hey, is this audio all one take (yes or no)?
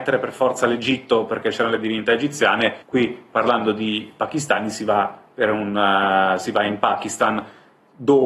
no